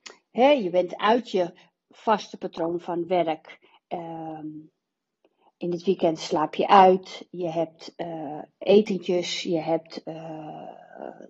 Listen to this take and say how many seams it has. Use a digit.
0